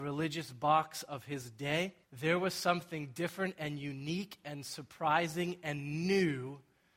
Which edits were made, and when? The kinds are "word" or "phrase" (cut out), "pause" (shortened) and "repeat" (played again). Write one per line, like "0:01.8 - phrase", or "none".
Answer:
0:02.0 - pause